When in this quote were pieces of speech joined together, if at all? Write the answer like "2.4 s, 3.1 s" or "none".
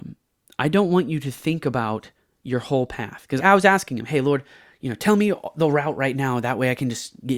3.4 s